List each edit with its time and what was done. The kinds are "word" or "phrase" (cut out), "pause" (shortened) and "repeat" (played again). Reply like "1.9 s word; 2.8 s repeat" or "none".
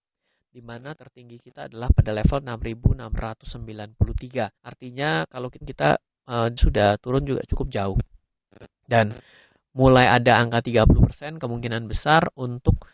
1.0 s word; 4.6 s pause; 5.6 s word; 6.6 s phrase